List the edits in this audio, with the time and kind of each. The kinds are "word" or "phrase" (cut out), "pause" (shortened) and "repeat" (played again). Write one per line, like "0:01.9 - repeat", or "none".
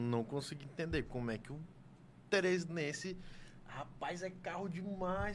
none